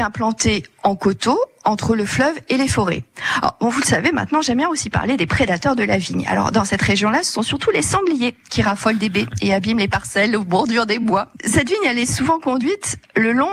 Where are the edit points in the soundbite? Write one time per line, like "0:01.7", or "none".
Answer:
none